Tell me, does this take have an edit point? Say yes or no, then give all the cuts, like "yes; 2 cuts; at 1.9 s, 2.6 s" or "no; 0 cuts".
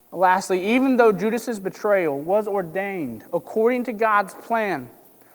no; 0 cuts